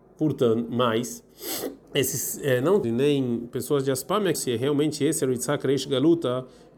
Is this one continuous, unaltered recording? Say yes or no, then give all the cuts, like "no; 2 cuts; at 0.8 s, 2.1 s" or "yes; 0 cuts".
no; 3 cuts; at 1.8 s, 2.8 s, 4.3 s